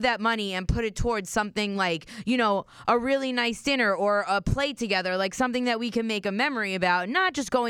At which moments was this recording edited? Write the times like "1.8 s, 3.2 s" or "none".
none